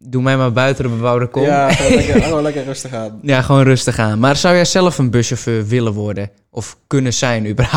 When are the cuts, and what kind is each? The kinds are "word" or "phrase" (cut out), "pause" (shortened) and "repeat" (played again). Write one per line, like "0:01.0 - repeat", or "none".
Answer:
none